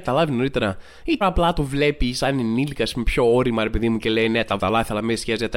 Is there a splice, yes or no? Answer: yes